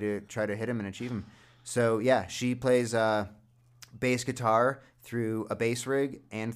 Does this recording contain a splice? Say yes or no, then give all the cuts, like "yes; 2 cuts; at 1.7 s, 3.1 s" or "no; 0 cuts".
no; 0 cuts